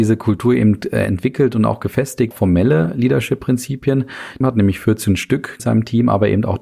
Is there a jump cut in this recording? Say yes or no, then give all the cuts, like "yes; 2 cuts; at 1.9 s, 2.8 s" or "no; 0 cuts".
yes; 3 cuts; at 2.3 s, 4.4 s, 5.6 s